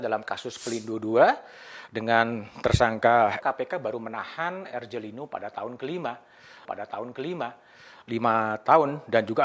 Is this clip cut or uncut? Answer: cut